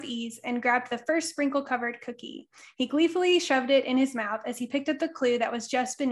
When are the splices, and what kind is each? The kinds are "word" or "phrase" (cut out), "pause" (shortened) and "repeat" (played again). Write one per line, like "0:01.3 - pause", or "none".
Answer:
none